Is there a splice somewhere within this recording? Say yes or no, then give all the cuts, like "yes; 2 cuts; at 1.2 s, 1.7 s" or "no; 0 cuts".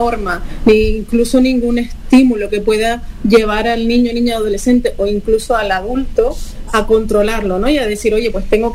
yes; 1 cut; at 6.7 s